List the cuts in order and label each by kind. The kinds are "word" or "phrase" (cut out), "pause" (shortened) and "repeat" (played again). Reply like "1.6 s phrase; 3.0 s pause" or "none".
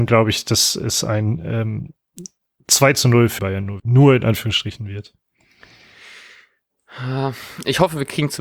3.4 s word; 3.8 s word